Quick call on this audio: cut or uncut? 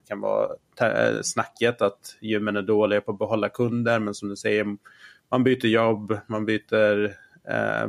uncut